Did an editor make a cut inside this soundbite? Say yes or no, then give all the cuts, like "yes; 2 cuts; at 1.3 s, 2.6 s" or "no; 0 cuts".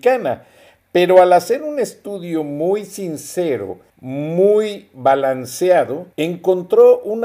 yes; 2 cuts; at 3.9 s, 6.1 s